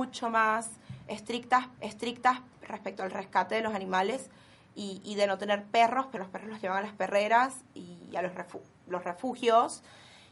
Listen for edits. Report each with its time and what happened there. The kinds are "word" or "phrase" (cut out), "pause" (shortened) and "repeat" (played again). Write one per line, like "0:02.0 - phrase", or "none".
0:01.8 - repeat
0:06.2 - word